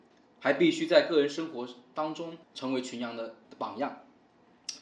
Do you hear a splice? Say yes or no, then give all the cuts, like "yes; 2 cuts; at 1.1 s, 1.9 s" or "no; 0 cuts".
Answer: yes; 2 cuts; at 2.4 s, 3.4 s